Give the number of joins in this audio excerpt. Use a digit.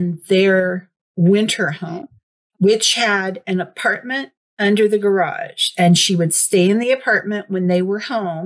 0